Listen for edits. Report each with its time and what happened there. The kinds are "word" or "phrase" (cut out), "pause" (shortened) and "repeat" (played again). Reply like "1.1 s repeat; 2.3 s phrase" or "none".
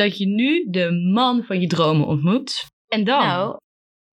2.8 s pause

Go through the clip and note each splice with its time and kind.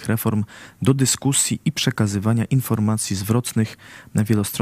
none

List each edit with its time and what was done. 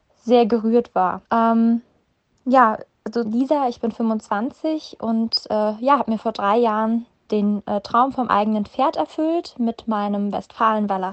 1.2 s pause; 3.2 s phrase

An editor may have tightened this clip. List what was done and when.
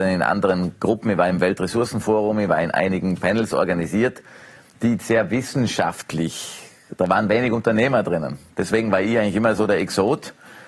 none

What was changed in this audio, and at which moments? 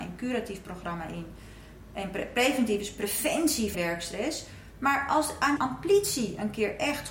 3.7 s phrase; 5.6 s word

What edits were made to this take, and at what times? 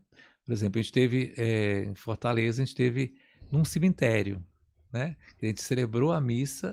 none

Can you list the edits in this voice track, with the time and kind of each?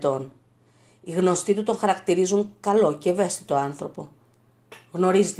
none

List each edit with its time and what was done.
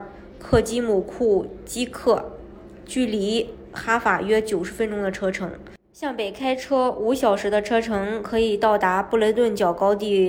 5.8 s pause

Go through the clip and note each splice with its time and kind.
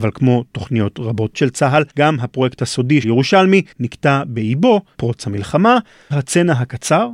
1.3 s word; 1.9 s pause; 3.0 s word; 3.7 s pause; 4.9 s word; 6.1 s word

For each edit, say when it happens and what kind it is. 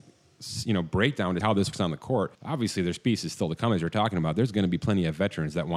1.4 s word; 1.7 s word; 2.3 s pause

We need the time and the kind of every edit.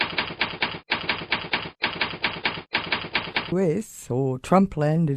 3.5 s phrase

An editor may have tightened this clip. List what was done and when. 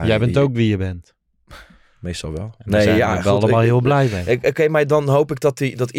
none

